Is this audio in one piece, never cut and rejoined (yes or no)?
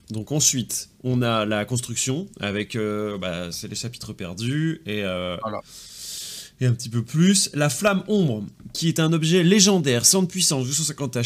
yes